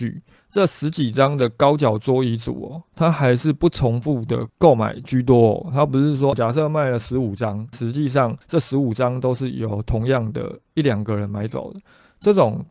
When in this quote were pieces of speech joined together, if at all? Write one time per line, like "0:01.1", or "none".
0:08.4